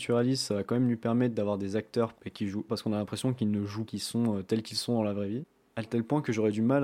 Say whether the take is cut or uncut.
cut